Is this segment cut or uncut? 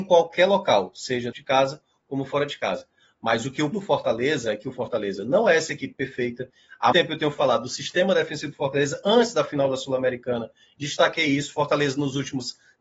cut